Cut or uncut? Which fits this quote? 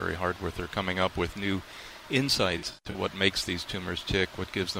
uncut